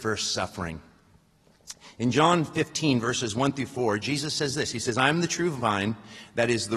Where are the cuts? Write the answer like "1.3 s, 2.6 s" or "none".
none